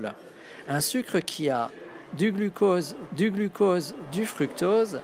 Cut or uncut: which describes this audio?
cut